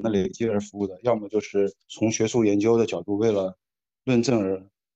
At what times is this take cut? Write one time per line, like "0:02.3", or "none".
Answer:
0:01.8

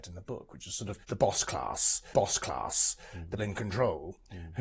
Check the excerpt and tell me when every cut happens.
0:01.0
0:02.1
0:03.4

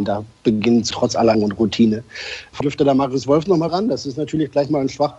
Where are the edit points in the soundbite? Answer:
0:00.9
0:01.3
0:02.6
0:03.7

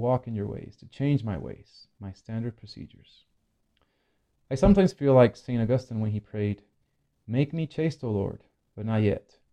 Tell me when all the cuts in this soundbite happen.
none

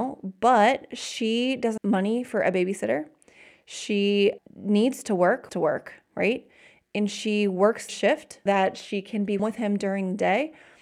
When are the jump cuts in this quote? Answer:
0:01.8
0:04.4
0:05.5
0:07.9
0:08.5
0:09.4

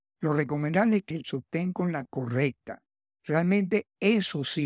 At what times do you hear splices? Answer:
0:01.1
0:02.1

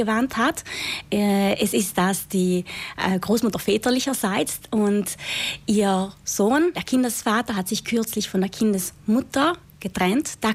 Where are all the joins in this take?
0:06.7

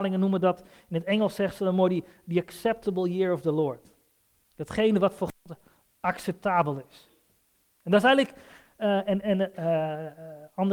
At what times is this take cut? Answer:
0:09.2

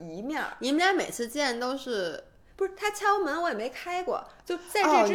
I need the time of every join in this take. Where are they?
none

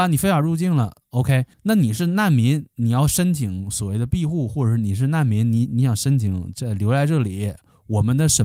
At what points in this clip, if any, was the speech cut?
0:01.5

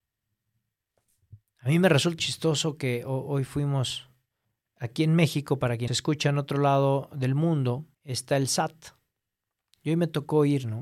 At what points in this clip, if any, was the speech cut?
0:02.2
0:04.4
0:05.9
0:07.9

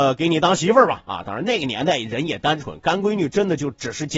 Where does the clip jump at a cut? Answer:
none

